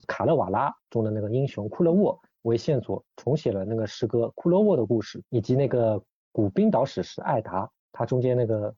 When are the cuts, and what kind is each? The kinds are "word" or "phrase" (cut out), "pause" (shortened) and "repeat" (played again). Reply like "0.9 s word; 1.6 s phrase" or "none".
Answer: 5.2 s pause; 7.8 s pause